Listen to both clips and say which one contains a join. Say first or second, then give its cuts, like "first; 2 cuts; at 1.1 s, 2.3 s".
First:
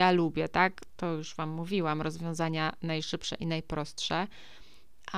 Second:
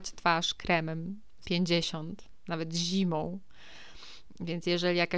second; 1 cut; at 1.4 s